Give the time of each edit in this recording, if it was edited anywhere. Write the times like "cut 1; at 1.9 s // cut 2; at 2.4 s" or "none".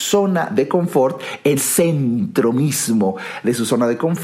cut 1; at 1.6 s